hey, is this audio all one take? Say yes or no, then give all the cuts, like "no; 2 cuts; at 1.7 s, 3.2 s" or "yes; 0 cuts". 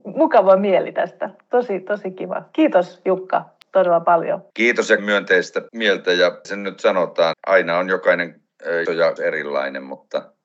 no; 7 cuts; at 4.5 s, 5.0 s, 5.7 s, 6.4 s, 7.3 s, 8.9 s, 9.2 s